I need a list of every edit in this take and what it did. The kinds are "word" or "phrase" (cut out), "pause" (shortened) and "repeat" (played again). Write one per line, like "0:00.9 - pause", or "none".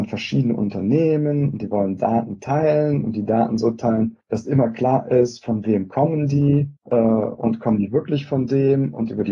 0:04.2 - pause
0:06.8 - pause